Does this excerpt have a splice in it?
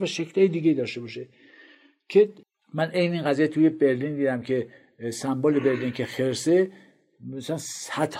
no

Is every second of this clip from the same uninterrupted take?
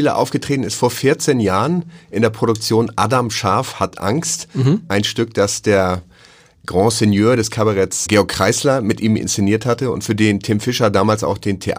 no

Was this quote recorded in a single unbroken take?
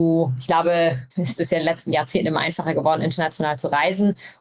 no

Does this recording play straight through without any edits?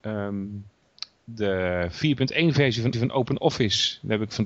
no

